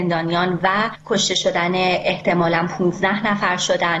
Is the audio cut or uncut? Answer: uncut